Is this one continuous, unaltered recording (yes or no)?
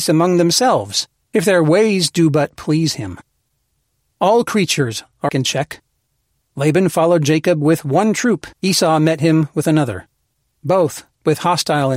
no